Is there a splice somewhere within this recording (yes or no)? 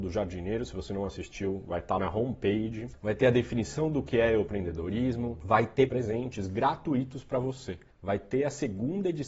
yes